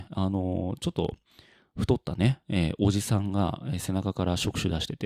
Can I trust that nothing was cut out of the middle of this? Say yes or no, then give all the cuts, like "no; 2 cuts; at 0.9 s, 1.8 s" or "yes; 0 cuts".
yes; 0 cuts